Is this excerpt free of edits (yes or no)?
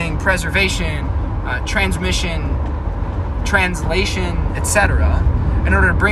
yes